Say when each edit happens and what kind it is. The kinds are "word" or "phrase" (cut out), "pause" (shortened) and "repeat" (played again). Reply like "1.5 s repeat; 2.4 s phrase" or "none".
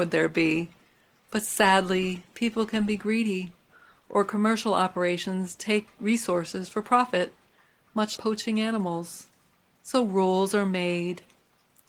8.2 s word